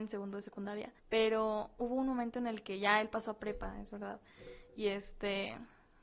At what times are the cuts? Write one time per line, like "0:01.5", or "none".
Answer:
0:01.0